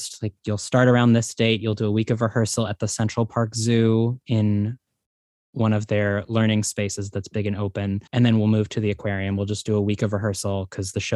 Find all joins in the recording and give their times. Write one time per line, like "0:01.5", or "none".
0:08.1